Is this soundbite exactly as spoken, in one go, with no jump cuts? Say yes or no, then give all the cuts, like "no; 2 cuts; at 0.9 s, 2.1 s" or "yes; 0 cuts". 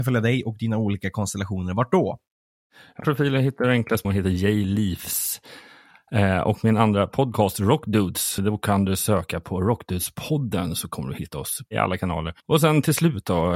no; 4 cuts; at 3.0 s, 4.0 s, 8.4 s, 12.4 s